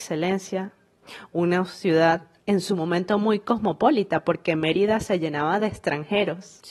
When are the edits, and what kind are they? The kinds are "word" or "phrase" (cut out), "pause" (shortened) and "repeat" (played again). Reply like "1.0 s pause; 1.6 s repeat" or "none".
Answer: 2.4 s pause